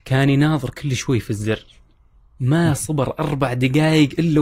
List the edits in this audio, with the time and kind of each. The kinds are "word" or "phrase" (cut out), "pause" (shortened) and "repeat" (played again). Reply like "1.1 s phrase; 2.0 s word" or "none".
none